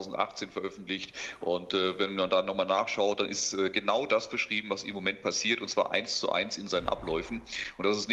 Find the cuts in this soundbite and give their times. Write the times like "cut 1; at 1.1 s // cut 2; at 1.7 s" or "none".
none